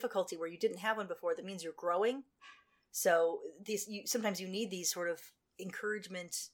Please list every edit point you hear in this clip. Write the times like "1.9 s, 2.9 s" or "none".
none